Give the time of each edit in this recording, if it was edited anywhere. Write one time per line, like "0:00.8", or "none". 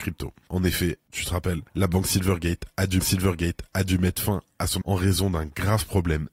0:01.7
0:03.0
0:04.8